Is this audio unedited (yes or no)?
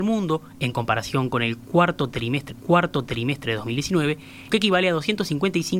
no